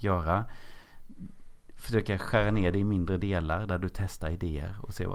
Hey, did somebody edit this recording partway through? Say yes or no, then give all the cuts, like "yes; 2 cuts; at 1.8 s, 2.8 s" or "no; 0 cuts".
no; 0 cuts